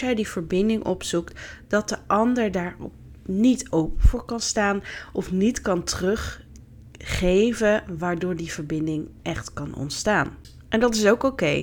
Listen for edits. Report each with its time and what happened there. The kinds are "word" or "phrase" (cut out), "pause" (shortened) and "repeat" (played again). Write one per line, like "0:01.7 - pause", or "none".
none